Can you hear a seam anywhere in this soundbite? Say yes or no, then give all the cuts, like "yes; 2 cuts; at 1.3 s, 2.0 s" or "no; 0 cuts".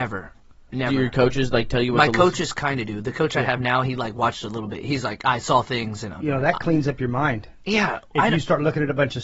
no; 0 cuts